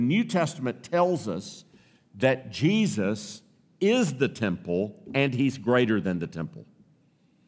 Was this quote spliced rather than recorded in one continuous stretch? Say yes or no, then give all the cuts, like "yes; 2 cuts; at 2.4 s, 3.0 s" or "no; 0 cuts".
no; 0 cuts